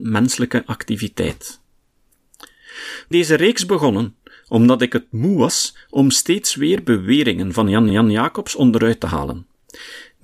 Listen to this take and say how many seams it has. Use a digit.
2